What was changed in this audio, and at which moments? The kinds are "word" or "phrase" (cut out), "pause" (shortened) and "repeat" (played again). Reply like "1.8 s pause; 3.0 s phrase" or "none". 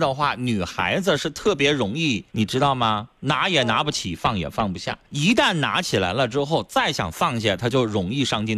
2.3 s pause; 3.2 s pause; 5.0 s pause